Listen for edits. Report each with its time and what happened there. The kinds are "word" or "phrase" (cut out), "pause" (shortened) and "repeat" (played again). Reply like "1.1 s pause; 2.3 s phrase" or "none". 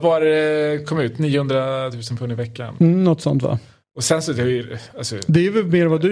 none